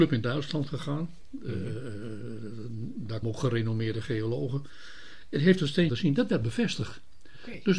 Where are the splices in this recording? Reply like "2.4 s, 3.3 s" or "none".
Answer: 3.2 s, 5.9 s